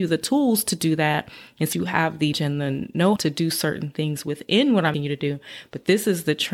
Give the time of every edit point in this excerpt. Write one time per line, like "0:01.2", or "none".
0:01.7
0:02.3
0:03.2
0:04.9